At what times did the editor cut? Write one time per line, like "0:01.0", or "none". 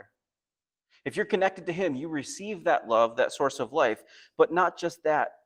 none